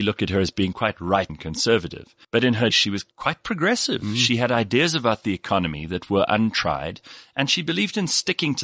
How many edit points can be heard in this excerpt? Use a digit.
4